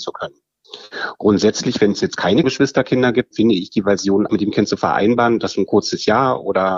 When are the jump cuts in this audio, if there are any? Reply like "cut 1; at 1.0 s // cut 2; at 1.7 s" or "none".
cut 1; at 2.4 s // cut 2; at 3.3 s // cut 3; at 4.3 s